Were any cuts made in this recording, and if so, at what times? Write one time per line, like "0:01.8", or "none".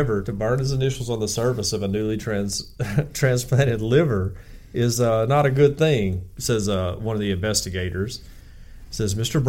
none

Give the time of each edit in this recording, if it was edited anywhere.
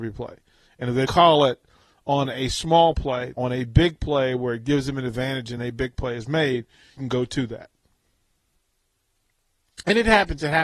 0:01.1
0:03.3
0:05.6
0:07.0

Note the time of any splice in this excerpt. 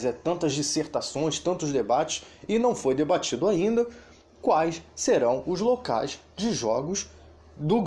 none

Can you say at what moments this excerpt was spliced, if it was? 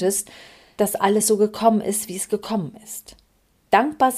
none

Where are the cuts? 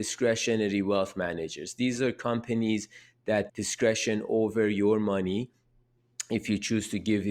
0:03.5

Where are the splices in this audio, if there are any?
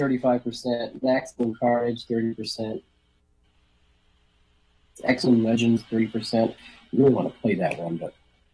none

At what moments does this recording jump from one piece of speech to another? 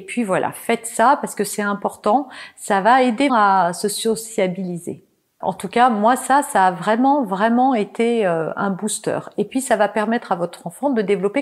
0:03.3

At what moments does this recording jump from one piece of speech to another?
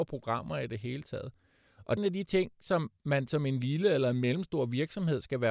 0:02.0

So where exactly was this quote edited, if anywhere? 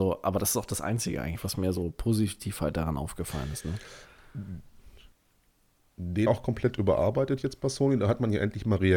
0:06.3

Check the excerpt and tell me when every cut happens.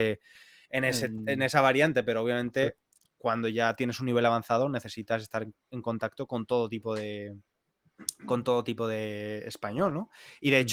none

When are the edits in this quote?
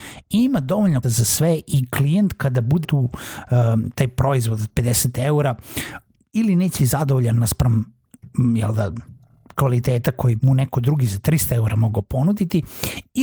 0:01.0
0:02.8
0:06.8
0:10.4

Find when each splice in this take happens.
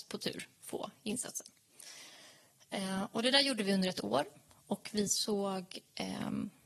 none

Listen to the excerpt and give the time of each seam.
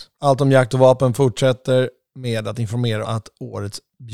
0:03.0

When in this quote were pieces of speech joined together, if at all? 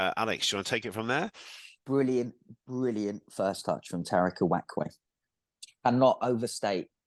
0:01.8

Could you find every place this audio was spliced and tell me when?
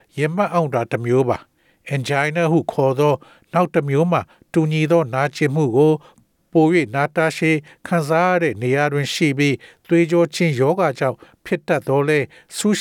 none

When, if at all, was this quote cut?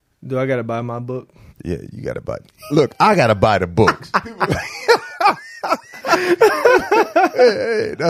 0:01.5

